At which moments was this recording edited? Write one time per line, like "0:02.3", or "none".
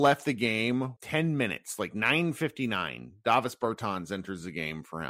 0:01.0